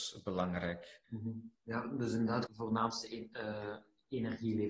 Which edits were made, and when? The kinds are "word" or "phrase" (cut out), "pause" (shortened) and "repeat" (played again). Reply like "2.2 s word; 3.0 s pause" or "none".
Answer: 1.0 s pause; 1.5 s pause; 2.5 s phrase

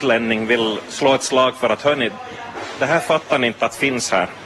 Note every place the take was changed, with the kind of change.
none

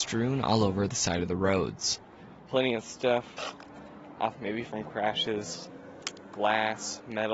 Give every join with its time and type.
4.3 s phrase

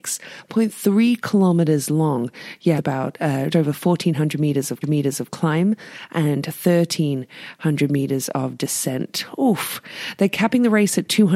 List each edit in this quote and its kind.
2.8 s word; 3.5 s word; 4.8 s repeat

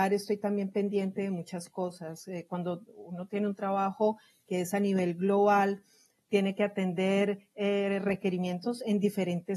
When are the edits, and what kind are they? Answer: none

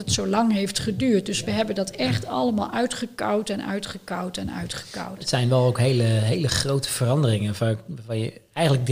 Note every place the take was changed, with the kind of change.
none

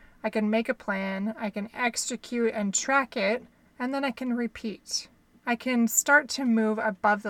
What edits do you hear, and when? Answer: 3.5 s pause

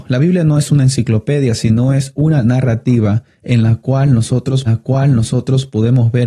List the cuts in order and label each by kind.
4.7 s repeat

